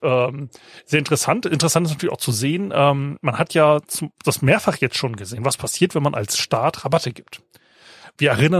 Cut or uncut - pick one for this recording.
uncut